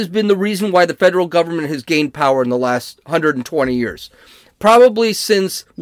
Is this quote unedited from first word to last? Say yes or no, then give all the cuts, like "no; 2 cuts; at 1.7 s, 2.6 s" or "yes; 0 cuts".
yes; 0 cuts